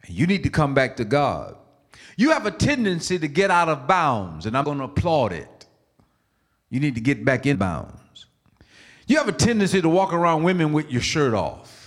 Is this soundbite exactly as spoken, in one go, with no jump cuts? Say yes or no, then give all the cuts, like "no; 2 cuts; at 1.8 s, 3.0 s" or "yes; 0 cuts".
no; 2 cuts; at 4.6 s, 7.5 s